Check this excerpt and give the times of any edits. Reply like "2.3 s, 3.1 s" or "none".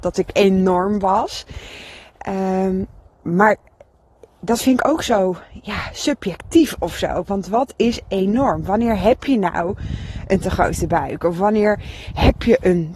none